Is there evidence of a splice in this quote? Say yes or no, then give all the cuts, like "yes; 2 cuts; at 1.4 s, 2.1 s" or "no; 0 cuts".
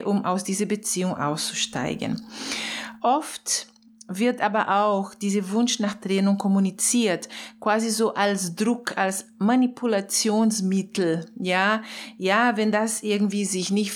no; 0 cuts